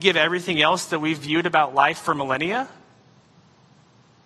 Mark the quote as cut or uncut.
uncut